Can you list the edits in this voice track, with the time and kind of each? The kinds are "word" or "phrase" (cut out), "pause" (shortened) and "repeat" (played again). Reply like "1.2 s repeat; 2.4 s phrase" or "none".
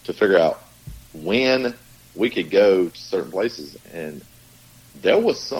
none